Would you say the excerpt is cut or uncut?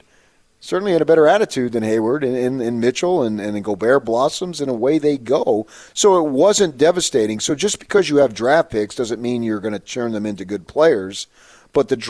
uncut